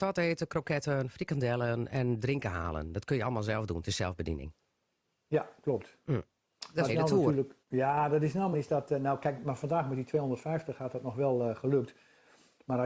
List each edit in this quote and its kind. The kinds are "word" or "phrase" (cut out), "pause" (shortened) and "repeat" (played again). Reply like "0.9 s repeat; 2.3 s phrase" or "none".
6.9 s word; 7.6 s pause; 8.5 s phrase

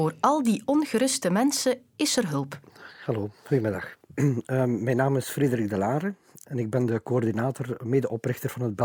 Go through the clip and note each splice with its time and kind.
none

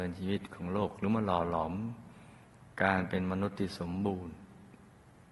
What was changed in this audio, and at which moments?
2.7 s pause

